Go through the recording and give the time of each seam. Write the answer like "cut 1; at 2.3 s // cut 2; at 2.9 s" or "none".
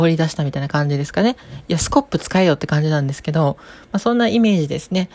none